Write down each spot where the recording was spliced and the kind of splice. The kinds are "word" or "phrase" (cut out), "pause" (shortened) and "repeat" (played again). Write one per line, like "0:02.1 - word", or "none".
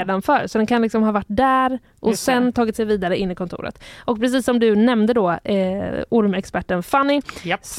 none